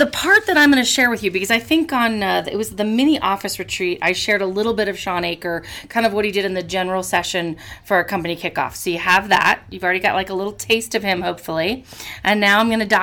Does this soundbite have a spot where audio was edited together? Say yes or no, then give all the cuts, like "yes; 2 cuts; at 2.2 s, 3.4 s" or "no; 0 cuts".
no; 0 cuts